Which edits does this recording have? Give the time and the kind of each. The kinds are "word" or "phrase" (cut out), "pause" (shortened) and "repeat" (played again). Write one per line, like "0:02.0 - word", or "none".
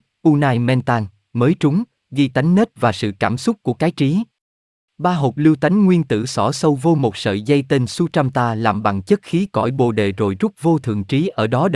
none